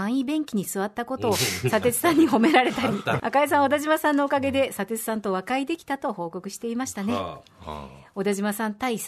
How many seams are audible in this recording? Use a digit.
1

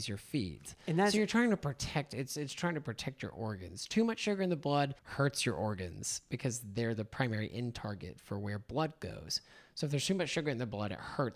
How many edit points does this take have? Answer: 1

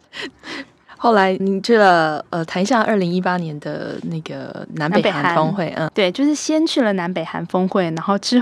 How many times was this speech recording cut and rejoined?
2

